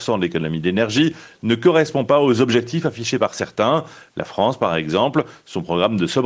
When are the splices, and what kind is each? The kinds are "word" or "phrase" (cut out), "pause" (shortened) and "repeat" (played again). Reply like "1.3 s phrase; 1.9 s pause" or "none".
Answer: none